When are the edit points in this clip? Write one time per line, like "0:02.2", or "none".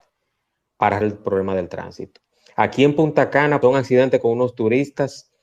0:01.0
0:03.6